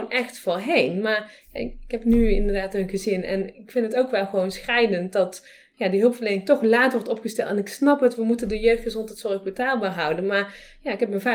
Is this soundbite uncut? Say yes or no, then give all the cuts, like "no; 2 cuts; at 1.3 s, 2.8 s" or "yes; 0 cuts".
yes; 0 cuts